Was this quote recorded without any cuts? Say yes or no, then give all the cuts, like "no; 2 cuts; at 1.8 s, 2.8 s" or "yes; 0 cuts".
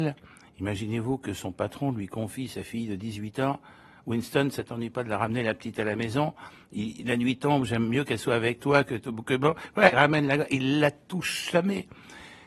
no; 1 cut; at 9.9 s